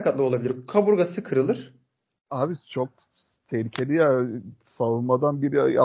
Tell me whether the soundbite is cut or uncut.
uncut